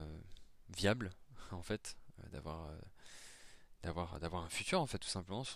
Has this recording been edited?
no; 0 cuts

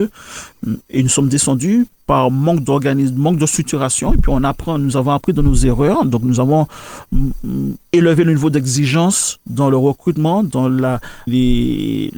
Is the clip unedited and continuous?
no; 1 cut; at 11.3 s

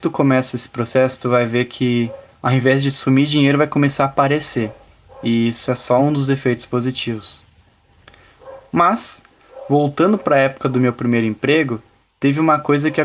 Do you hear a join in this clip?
no; 0 cuts

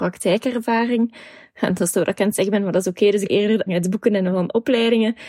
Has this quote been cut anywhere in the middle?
yes; 3 cuts; at 1.9 s, 3.3 s, 3.7 s

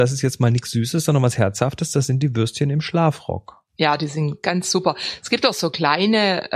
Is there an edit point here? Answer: no; 0 cuts

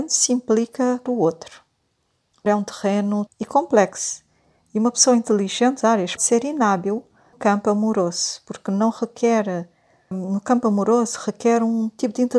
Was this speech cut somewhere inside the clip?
yes; 7 cuts; at 1.1 s, 2.5 s, 3.3 s, 5.8 s, 6.2 s, 7.3 s, 10.1 s

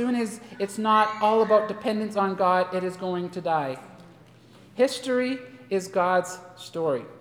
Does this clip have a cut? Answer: no; 0 cuts

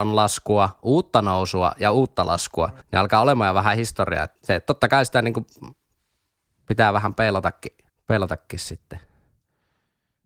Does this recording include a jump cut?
yes; 3 cuts; at 2.8 s, 4.4 s, 7.9 s

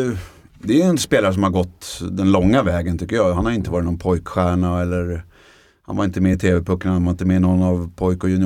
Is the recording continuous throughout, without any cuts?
yes; 0 cuts

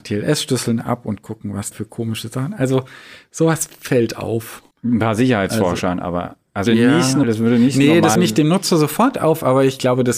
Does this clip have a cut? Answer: yes; 5 cuts; at 1.7 s, 4.7 s, 6.7 s, 7.2 s, 8.1 s

